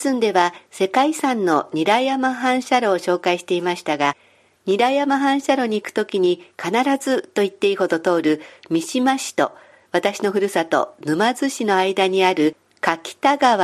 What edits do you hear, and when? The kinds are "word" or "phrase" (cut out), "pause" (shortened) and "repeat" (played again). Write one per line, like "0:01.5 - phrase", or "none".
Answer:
none